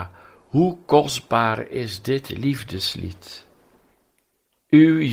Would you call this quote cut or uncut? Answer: uncut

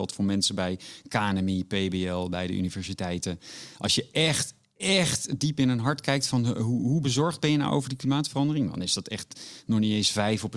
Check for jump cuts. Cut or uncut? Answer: uncut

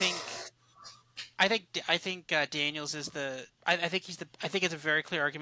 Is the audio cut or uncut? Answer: cut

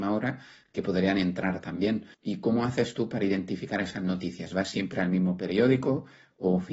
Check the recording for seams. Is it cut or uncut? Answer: cut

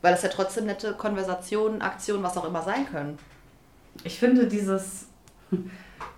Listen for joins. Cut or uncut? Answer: uncut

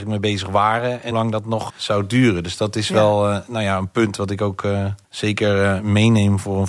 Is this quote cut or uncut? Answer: cut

